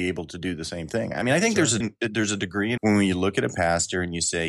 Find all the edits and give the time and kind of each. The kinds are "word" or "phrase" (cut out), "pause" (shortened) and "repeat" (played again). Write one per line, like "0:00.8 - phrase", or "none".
0:01.8 - word
0:02.8 - word